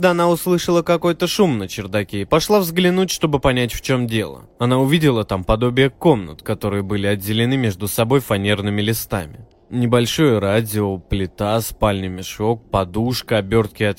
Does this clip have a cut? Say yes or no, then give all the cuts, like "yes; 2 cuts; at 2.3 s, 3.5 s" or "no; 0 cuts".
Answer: yes; 2 cuts; at 4.6 s, 9.6 s